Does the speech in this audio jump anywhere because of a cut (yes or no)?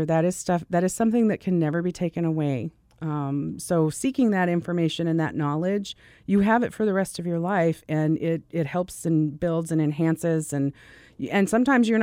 no